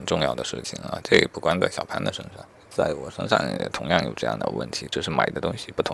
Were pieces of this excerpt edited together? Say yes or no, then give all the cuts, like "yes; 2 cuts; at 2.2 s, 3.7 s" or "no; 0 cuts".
yes; 1 cut; at 2.5 s